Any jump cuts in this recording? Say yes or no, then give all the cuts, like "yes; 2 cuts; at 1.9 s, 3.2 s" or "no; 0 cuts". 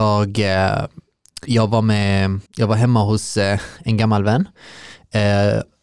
yes; 1 cut; at 2.5 s